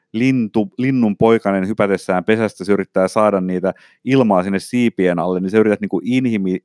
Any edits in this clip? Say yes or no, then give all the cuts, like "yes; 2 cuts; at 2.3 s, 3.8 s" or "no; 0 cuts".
no; 0 cuts